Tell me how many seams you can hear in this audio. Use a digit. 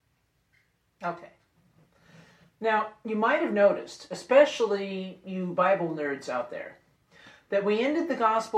0